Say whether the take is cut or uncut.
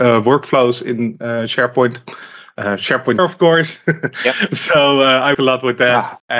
cut